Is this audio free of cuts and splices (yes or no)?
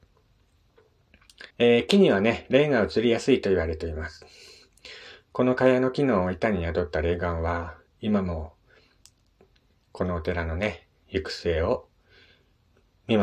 no